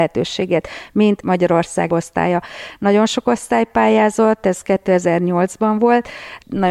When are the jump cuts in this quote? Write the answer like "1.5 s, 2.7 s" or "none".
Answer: 1.9 s